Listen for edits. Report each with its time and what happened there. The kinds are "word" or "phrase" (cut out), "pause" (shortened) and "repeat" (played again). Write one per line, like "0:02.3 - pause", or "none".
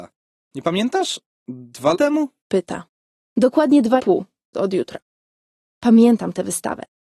0:01.9 - word
0:04.0 - word
0:04.5 - word

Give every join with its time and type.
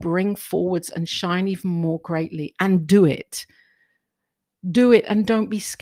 none

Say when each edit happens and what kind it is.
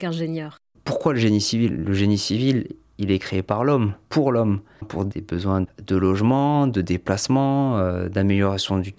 0:04.0 - pause

